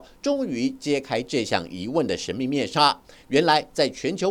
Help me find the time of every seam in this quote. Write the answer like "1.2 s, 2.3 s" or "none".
none